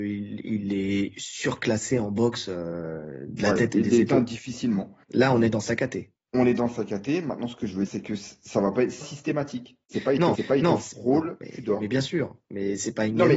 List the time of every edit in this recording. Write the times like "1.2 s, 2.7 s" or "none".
5.0 s, 6.2 s, 7.9 s, 9.0 s, 9.8 s, 10.4 s